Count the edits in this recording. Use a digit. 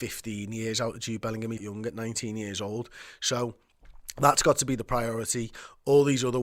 1